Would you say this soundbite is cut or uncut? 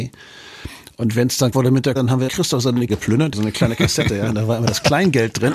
cut